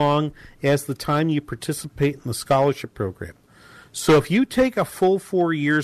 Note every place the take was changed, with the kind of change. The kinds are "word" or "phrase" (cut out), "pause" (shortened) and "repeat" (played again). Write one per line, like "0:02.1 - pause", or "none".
none